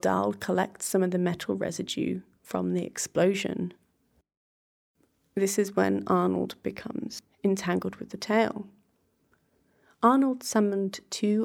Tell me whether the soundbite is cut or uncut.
uncut